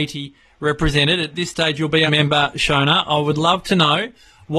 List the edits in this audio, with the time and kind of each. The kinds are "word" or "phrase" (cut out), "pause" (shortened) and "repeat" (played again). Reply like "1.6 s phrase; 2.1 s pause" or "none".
2.1 s phrase